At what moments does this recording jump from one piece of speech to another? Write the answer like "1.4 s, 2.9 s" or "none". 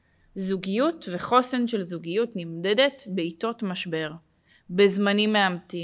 none